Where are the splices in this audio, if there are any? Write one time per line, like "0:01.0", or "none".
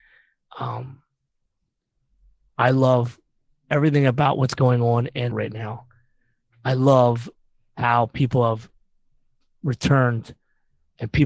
0:05.3